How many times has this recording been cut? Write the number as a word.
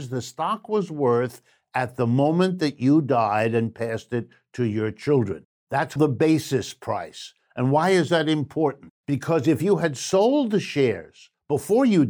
two